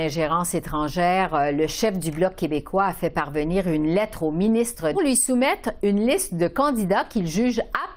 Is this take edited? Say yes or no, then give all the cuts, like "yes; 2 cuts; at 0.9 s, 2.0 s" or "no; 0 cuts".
yes; 1 cut; at 4.9 s